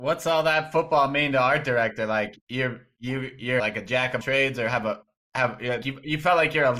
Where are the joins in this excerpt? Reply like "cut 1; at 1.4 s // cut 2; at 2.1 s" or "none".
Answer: cut 1; at 3.6 s // cut 2; at 4.2 s // cut 3; at 5.8 s